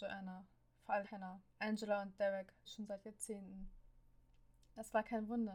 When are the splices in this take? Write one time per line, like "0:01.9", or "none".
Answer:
0:01.0
0:01.5
0:02.7